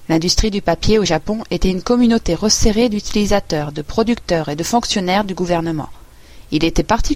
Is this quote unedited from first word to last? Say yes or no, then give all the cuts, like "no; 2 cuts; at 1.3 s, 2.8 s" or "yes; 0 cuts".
yes; 0 cuts